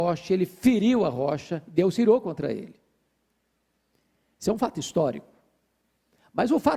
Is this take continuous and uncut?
yes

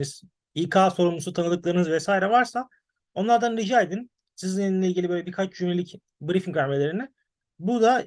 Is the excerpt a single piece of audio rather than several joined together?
yes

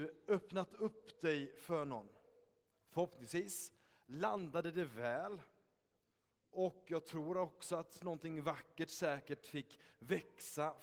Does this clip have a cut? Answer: no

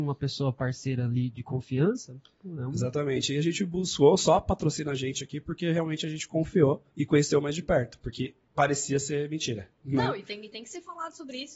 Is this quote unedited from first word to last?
no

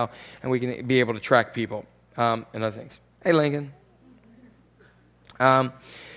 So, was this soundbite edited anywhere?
no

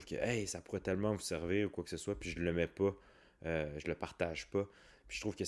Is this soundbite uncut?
yes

